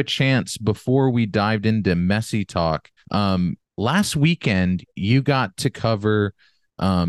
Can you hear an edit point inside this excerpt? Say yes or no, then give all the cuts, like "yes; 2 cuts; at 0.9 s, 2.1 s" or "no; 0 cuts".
yes; 1 cut; at 3.0 s